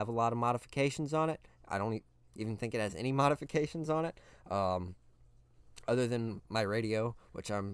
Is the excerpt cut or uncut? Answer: uncut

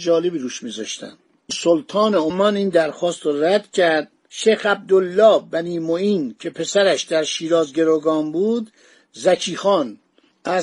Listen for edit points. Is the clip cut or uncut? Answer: uncut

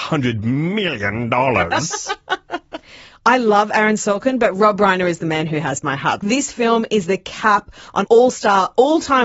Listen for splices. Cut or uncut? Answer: cut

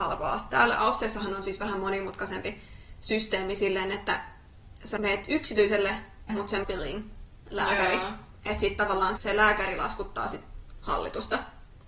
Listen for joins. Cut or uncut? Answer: cut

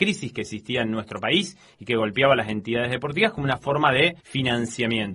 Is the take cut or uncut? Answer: cut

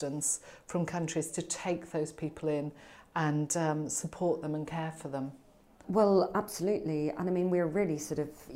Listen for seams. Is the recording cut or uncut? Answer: uncut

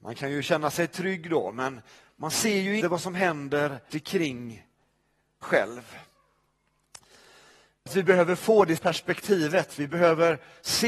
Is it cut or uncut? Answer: cut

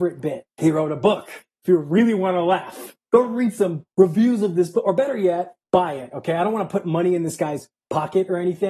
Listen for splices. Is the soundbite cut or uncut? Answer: cut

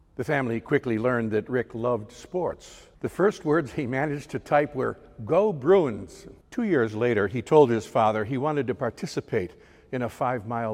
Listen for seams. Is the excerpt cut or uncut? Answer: cut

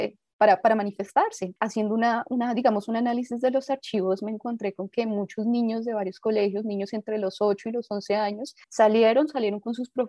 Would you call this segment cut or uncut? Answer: cut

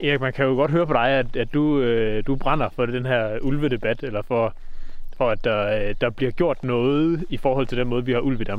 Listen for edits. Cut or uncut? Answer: uncut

